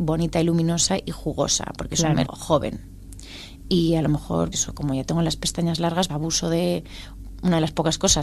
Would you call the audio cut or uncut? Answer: cut